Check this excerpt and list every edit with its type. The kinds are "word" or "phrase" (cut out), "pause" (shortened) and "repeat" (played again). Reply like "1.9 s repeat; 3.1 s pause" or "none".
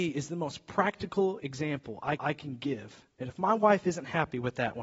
2.2 s repeat